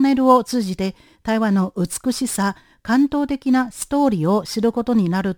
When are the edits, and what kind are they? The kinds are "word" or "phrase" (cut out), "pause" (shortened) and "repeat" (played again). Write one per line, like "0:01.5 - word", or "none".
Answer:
none